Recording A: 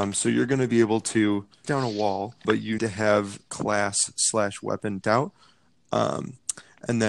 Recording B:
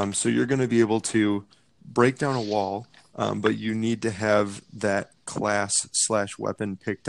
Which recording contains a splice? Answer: A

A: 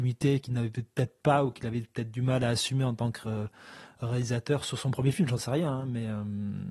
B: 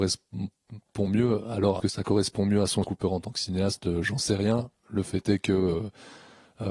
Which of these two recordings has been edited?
B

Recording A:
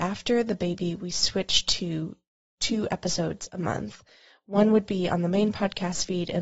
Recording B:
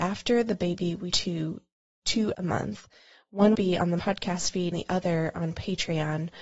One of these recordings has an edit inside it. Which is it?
B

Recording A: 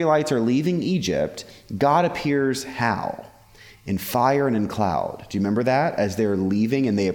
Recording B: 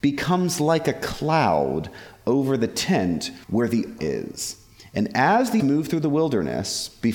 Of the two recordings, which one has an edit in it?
B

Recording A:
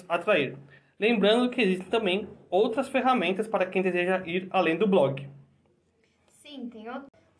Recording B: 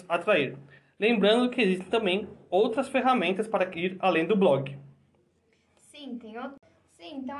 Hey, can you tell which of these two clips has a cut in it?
B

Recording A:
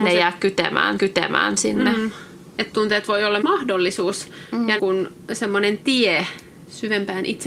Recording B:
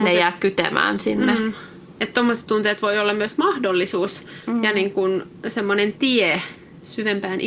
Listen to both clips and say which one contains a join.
A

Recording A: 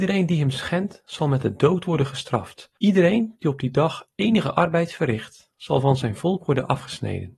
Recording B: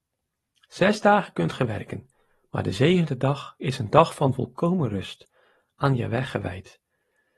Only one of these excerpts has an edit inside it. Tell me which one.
A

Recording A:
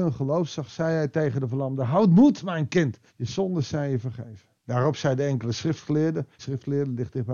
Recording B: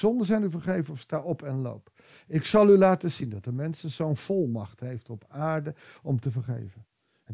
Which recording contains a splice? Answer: A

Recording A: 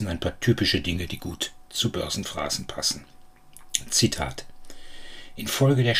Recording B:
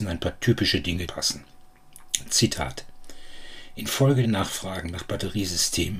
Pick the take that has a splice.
B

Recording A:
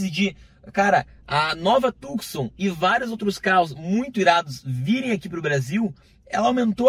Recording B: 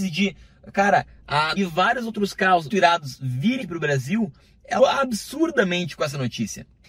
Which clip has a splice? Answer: B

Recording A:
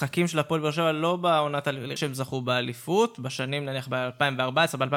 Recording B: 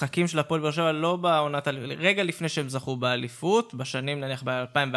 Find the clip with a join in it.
A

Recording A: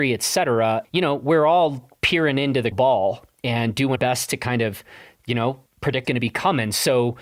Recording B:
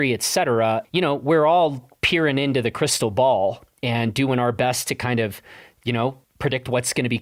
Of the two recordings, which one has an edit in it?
A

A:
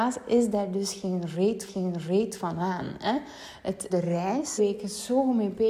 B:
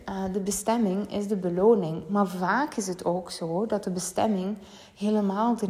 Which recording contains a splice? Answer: A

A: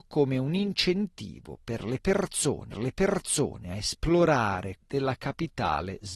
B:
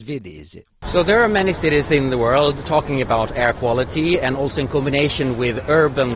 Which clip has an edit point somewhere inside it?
A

